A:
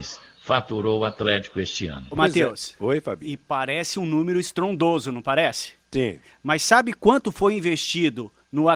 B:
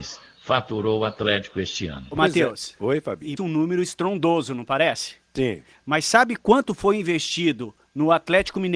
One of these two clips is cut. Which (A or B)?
B